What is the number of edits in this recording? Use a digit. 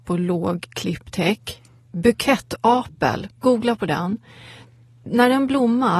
1